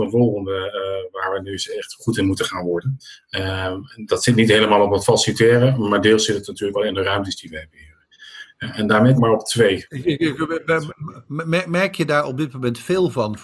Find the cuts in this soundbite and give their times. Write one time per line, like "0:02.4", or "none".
0:06.7
0:09.2